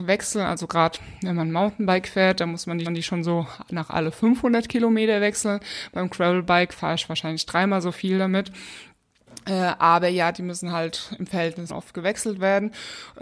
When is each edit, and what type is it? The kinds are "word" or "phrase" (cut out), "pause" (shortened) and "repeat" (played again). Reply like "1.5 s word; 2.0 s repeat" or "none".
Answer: 2.9 s repeat; 11.7 s word